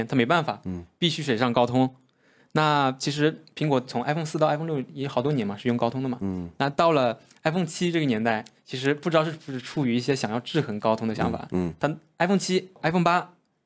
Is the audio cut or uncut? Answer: uncut